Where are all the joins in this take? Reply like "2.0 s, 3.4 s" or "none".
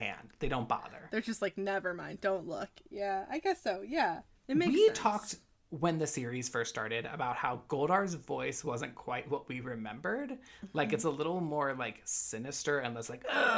none